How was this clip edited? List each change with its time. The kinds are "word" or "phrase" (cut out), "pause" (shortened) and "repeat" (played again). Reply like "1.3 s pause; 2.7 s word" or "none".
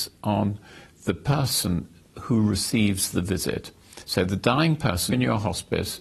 5.1 s word